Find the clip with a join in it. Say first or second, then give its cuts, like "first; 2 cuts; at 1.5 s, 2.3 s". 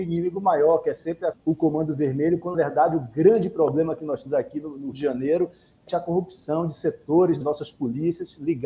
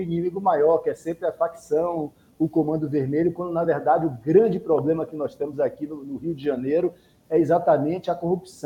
first; 6 cuts; at 1.3 s, 2.5 s, 4.3 s, 4.9 s, 5.9 s, 7.4 s